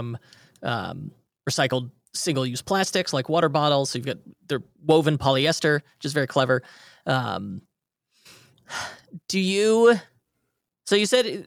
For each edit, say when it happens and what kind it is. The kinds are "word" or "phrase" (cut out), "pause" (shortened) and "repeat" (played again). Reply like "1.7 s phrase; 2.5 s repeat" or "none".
none